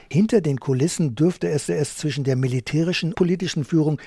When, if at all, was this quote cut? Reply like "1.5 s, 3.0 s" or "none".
1.7 s, 3.1 s

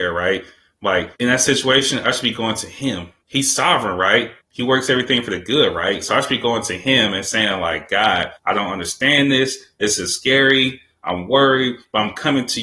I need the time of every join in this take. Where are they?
1.2 s, 3.2 s, 4.4 s, 8.4 s

